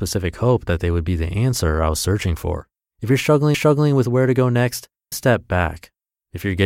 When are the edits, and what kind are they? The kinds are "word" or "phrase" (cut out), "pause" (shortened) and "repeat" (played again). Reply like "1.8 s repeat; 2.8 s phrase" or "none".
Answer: 2.8 s pause; 3.5 s repeat; 5.1 s phrase